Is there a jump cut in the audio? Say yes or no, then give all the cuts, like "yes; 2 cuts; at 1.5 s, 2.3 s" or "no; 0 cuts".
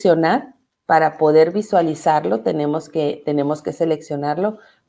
no; 0 cuts